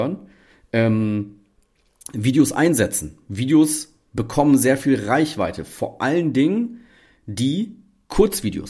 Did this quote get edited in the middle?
no; 0 cuts

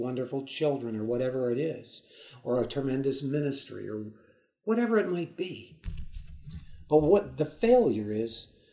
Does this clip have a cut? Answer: no; 0 cuts

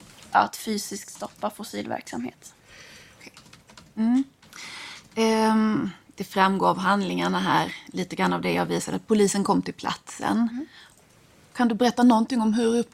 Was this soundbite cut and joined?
no; 0 cuts

